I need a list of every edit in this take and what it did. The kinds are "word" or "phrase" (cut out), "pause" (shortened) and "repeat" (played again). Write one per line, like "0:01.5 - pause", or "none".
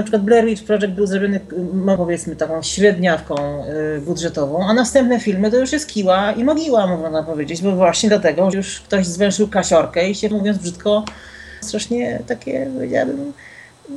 0:02.0 - word
0:08.5 - word
0:10.3 - word
0:11.6 - word